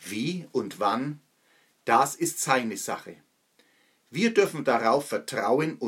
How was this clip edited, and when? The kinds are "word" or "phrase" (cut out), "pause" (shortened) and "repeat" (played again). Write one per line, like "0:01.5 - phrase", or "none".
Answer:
none